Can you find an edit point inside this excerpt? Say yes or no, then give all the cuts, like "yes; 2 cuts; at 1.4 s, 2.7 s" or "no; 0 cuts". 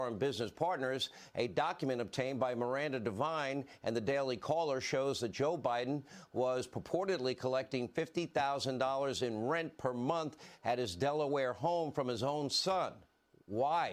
no; 0 cuts